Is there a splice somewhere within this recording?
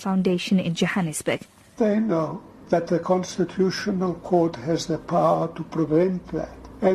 yes; 1 cut; at 1.8 s

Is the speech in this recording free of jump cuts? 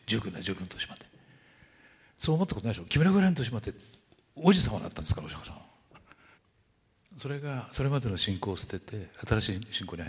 no; 1 cut; at 6.3 s

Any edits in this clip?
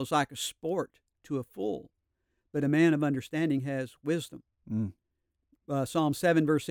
no; 0 cuts

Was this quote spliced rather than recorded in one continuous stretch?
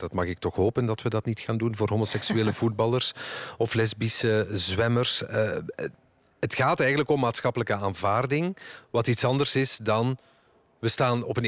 no; 0 cuts

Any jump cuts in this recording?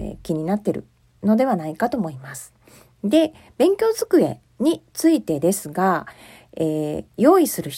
no; 0 cuts

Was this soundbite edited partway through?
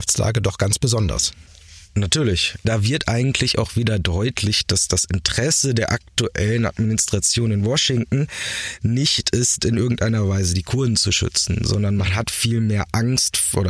no; 0 cuts

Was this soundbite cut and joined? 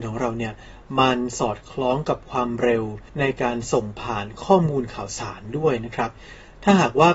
yes; 1 cut; at 3.1 s

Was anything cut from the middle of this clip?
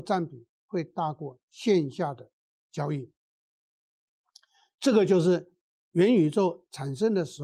no; 0 cuts

